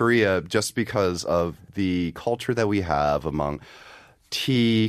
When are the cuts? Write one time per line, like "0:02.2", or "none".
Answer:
0:01.7